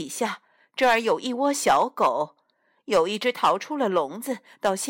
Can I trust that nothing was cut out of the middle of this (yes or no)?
yes